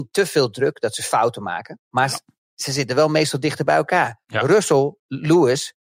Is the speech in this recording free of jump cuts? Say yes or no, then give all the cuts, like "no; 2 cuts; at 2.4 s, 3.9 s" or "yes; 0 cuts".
yes; 0 cuts